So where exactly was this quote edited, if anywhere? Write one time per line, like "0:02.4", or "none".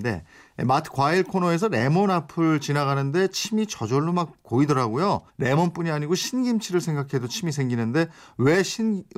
0:05.3